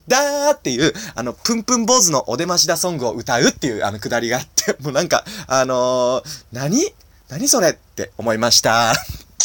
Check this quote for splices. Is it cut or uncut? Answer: uncut